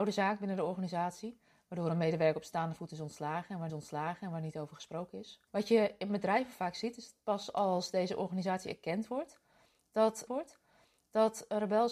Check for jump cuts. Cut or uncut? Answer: cut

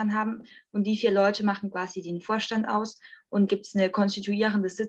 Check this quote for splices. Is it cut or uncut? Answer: cut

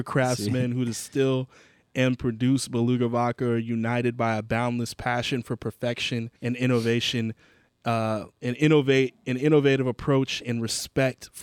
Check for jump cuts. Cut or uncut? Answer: cut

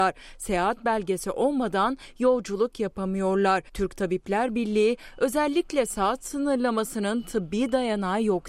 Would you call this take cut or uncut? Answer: cut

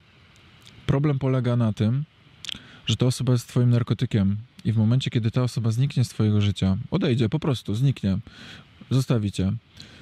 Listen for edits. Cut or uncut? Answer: uncut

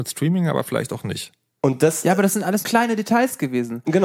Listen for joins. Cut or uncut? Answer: cut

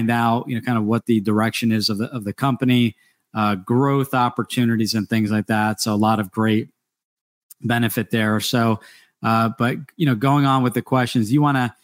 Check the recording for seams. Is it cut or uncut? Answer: uncut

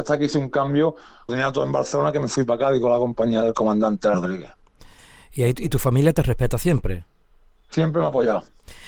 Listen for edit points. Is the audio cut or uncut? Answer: cut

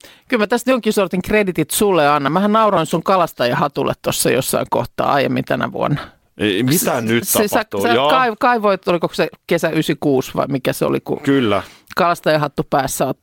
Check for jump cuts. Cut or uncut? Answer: uncut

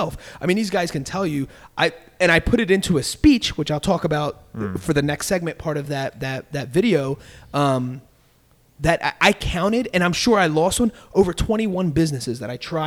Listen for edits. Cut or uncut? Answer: uncut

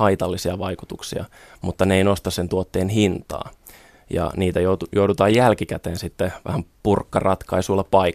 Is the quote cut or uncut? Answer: uncut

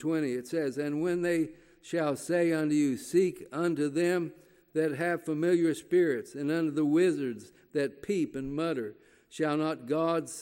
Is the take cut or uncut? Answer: uncut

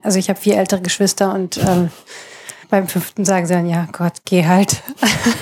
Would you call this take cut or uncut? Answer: cut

